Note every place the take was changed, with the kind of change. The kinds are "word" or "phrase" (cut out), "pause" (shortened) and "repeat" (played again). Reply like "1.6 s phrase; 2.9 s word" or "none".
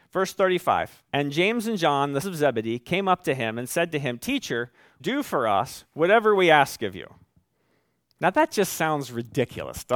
1.1 s pause; 2.2 s word; 5.0 s phrase